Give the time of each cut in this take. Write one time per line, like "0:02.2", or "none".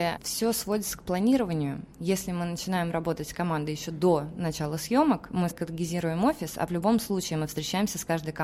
0:05.5
0:06.7